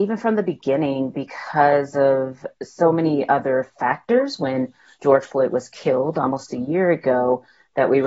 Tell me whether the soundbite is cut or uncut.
uncut